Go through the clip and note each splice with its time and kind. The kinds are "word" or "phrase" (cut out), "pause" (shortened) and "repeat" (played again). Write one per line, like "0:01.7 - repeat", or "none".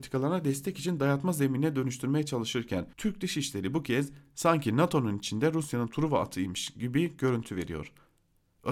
0:02.9 - pause